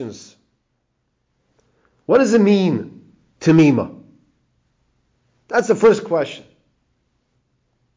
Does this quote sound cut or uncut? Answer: uncut